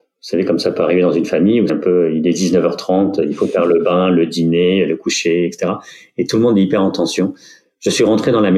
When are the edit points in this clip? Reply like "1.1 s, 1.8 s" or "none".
1.7 s